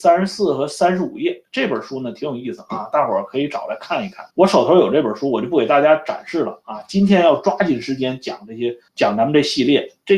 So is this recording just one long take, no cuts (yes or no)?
no